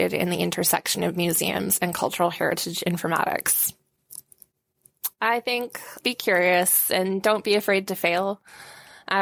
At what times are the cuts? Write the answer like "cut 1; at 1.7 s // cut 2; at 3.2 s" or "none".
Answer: cut 1; at 5.1 s // cut 2; at 6.0 s